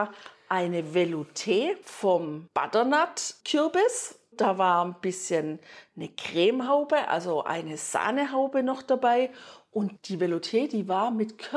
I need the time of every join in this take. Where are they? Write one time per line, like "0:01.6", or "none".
none

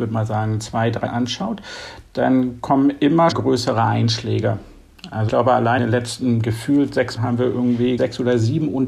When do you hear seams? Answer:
0:01.1
0:03.3
0:05.3
0:05.8
0:07.2
0:08.0

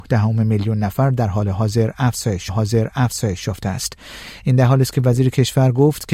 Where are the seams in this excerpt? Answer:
0:02.5

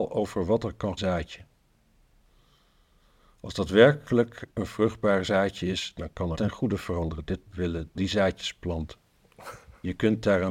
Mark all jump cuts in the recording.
0:01.0
0:04.5
0:06.3
0:07.5
0:07.9

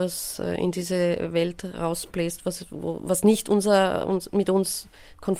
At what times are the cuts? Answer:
none

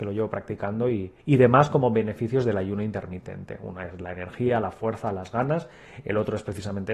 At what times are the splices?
0:01.2

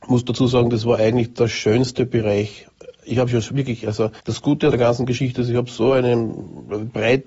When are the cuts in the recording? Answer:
0:04.2
0:04.7

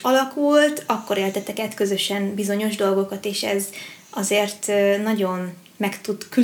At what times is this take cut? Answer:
none

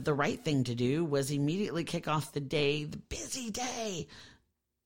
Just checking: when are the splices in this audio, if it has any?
none

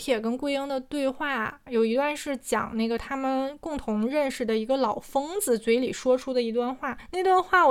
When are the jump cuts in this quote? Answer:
0:01.7

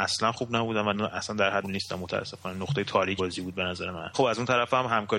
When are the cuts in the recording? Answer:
0:00.9
0:01.6
0:03.2
0:04.1

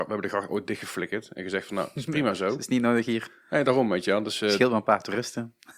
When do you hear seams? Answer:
none

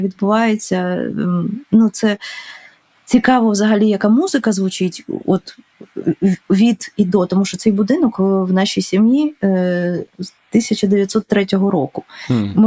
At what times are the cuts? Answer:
none

